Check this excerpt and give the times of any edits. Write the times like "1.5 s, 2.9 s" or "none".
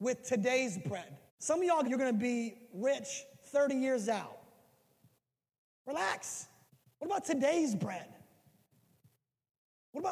1.3 s, 1.8 s, 6.7 s